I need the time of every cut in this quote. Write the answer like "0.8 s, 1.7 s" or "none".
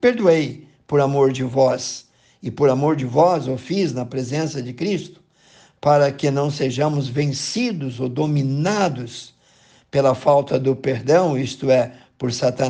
none